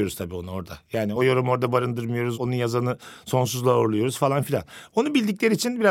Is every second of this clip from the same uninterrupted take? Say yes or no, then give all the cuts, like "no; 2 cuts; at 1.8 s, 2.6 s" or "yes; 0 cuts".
yes; 0 cuts